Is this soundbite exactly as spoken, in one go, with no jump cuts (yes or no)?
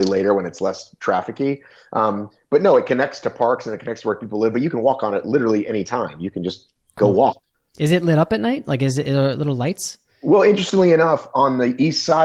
yes